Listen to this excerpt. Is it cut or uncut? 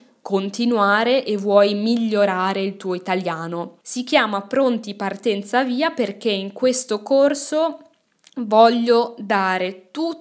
cut